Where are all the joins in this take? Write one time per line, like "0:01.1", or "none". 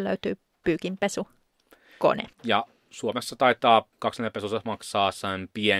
0:02.3
0:03.9